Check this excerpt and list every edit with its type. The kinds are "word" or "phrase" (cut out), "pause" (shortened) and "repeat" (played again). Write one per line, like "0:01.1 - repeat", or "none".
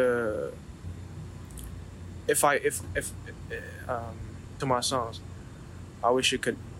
0:04.6 - phrase